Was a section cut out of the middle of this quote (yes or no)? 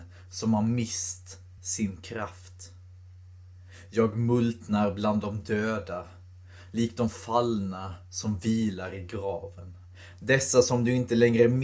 no